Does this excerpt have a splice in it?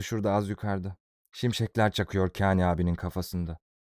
yes; 1 cut; at 1.1 s

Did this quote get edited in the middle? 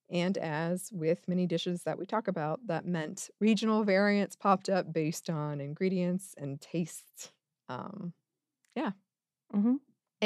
no; 0 cuts

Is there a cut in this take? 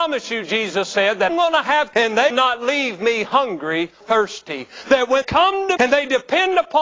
yes; 6 cuts; at 1.3 s, 1.9 s, 2.3 s, 4.0 s, 5.2 s, 5.8 s

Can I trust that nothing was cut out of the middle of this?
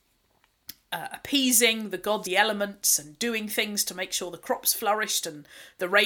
no; 1 cut; at 2.2 s

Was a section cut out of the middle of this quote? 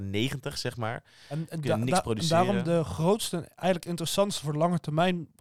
no; 0 cuts

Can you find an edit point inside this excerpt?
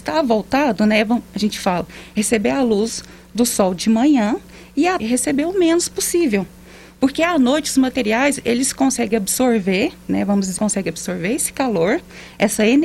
yes; 2 cuts; at 5.0 s, 10.6 s

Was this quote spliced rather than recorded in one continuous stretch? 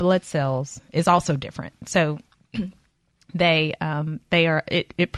no; 0 cuts

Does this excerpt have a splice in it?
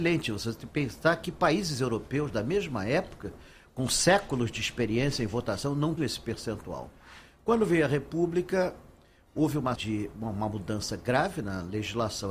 yes; 2 cuts; at 6.0 s, 9.8 s

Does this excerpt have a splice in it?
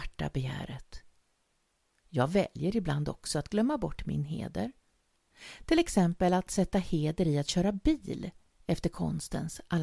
no; 0 cuts

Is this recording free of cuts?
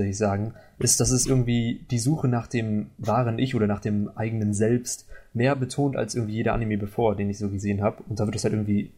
yes; 0 cuts

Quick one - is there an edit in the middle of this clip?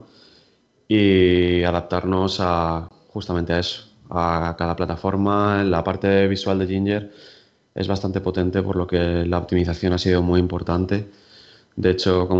no; 0 cuts

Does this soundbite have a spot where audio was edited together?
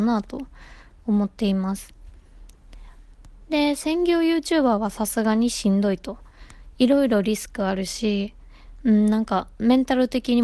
no; 0 cuts

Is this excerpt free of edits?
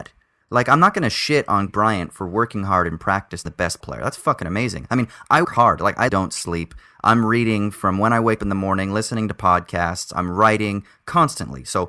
no; 6 cuts; at 1.7 s, 3.5 s, 3.8 s, 5.4 s, 6.1 s, 8.4 s

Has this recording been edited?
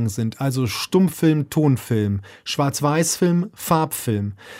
no; 0 cuts

